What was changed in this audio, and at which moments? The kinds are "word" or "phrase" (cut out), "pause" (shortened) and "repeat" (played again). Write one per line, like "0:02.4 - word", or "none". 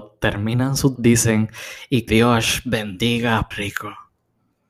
0:01.0 - word
0:02.1 - word
0:03.5 - word